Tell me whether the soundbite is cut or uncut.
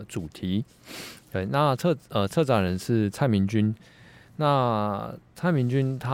uncut